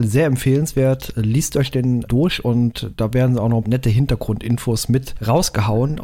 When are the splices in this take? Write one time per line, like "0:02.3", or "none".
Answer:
0:02.1
0:03.6